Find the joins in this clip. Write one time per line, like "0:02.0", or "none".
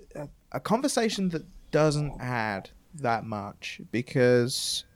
0:02.2